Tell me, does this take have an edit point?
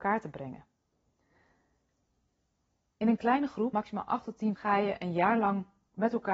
yes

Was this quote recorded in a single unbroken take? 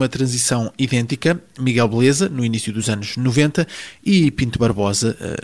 yes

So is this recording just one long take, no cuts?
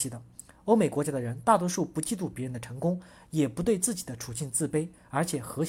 yes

